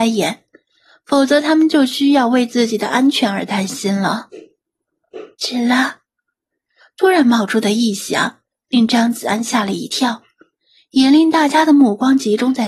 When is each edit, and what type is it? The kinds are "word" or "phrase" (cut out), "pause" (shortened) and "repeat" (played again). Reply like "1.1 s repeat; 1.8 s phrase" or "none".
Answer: 5.3 s pause